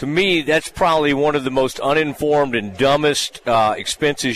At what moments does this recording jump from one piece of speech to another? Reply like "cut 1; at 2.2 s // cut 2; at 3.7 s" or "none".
none